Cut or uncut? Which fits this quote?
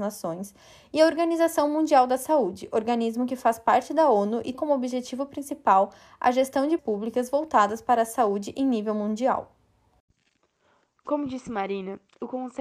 cut